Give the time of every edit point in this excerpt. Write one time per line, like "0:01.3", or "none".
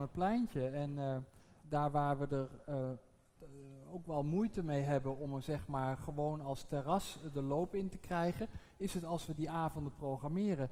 0:01.6